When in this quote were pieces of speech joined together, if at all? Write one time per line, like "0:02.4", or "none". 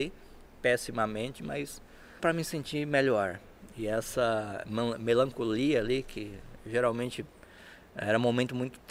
0:02.2

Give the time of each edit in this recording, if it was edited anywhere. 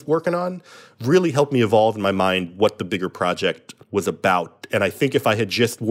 0:03.8

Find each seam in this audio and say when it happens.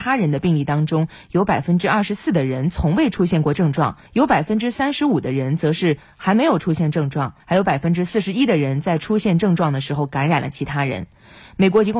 0:04.1
0:07.4

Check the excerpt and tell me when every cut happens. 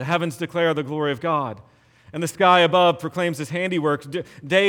none

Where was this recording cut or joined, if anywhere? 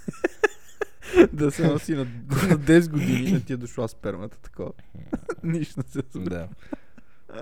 0:03.3

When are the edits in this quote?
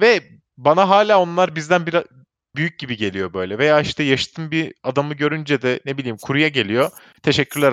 none

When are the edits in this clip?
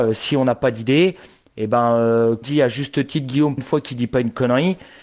0:02.4
0:03.6

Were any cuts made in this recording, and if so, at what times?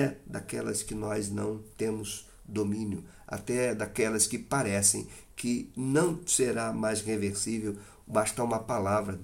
none

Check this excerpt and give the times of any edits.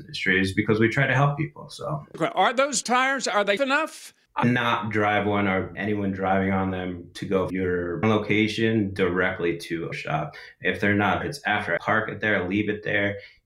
0:02.8
0:03.6
0:04.4
0:05.7
0:07.5
0:08.0
0:09.9
0:11.2
0:11.8

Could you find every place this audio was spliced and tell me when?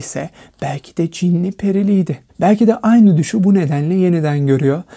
0:02.3

